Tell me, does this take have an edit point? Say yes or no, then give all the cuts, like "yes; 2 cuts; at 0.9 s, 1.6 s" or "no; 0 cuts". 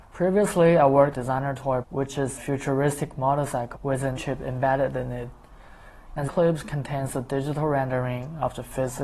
yes; 6 cuts; at 1.1 s, 1.8 s, 2.4 s, 3.7 s, 4.2 s, 6.3 s